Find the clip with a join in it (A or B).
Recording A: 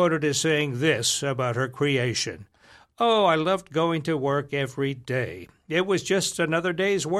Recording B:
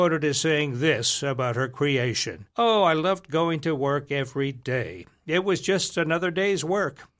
B